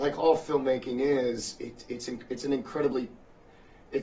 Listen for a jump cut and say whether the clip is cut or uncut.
uncut